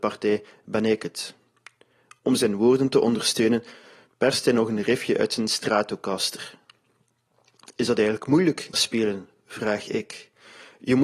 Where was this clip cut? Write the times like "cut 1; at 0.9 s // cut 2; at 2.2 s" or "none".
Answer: cut 1; at 8.7 s